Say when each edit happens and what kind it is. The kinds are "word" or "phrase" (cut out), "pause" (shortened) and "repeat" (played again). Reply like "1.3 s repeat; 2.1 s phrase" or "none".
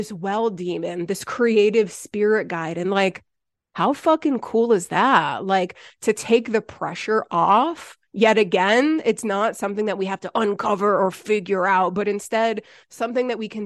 none